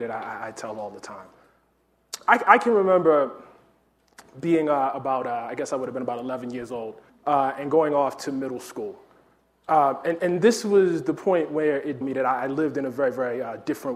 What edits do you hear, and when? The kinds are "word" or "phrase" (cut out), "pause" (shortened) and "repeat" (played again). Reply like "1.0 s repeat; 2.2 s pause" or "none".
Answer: 7.1 s pause; 12.0 s phrase